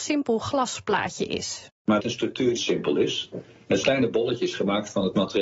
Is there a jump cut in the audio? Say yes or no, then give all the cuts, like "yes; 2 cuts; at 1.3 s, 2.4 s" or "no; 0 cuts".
yes; 3 cuts; at 2.0 s, 2.6 s, 3.8 s